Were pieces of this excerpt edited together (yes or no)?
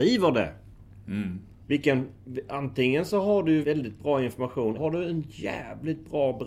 yes